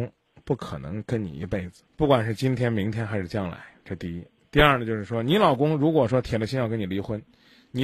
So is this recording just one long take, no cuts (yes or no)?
no